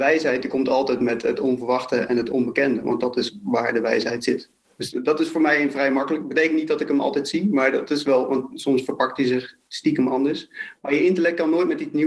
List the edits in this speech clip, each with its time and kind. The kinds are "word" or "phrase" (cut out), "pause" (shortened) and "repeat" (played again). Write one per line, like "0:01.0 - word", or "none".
none

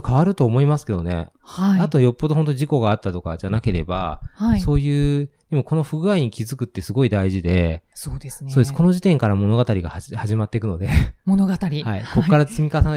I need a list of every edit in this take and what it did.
0:07.9 - pause

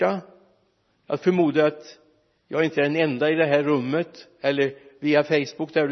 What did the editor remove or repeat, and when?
none

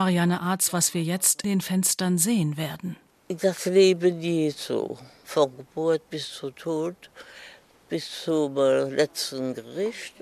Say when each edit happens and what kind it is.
0:01.4 - word

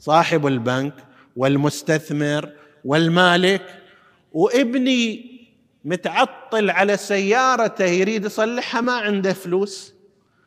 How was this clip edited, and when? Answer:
none

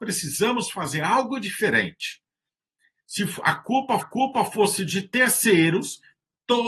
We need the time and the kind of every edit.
0:04.0 - repeat

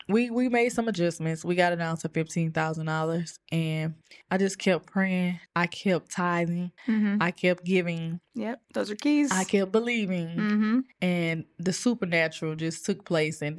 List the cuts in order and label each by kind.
none

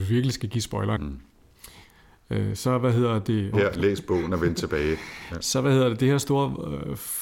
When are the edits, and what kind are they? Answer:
0:01.0 - word
0:03.5 - phrase

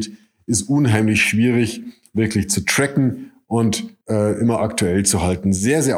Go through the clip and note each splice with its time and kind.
0:04.0 - pause

